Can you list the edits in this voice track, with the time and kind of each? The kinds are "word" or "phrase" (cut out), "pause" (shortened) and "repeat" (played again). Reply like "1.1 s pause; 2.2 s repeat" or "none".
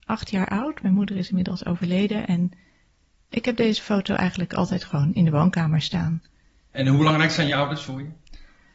none